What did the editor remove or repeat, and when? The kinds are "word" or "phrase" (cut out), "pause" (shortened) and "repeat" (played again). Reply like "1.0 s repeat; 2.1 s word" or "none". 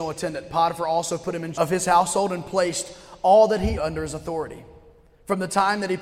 1.5 s word; 3.8 s word